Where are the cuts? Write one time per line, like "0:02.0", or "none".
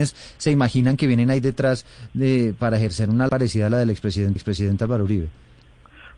0:03.3
0:04.4